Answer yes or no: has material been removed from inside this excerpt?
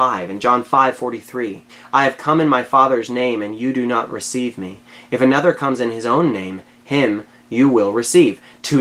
yes